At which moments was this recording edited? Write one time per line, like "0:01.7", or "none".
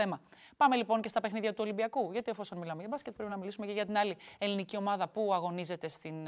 none

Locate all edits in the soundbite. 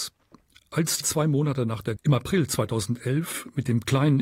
0:01.0
0:02.0

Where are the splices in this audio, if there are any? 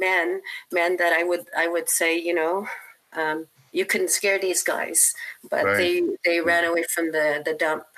0:03.6

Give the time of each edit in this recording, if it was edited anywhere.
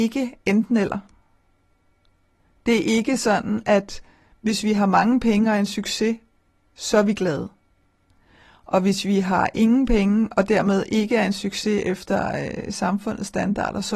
none

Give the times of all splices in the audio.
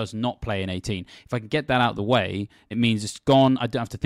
0:02.7

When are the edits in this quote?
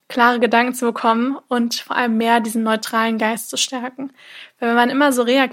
none

